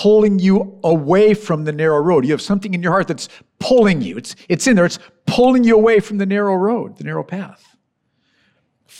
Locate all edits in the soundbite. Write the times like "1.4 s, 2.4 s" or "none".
none